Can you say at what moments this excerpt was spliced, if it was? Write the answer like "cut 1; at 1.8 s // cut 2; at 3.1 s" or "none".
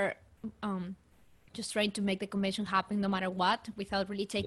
none